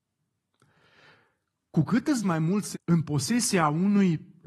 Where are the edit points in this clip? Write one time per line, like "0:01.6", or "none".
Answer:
0:02.2
0:02.7